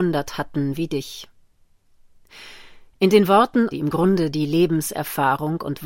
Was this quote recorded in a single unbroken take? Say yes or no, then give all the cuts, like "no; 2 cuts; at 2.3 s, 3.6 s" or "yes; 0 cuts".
no; 1 cut; at 3.7 s